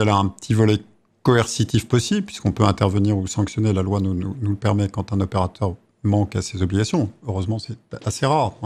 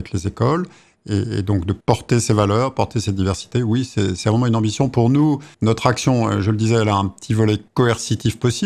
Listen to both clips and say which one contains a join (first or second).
second